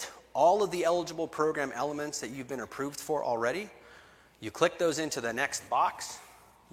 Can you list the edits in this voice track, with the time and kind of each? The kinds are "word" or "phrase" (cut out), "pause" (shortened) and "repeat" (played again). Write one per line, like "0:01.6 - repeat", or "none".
none